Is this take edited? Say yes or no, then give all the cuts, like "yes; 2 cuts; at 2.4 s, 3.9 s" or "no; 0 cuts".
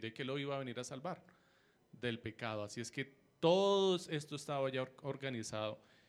no; 0 cuts